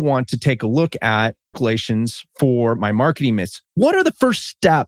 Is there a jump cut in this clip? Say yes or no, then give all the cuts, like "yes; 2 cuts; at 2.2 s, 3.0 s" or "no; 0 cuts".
yes; 1 cut; at 1.5 s